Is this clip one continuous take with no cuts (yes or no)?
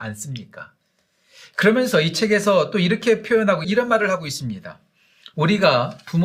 no